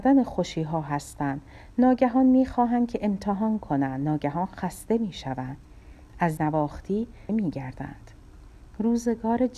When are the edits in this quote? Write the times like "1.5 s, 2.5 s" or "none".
6.4 s, 7.3 s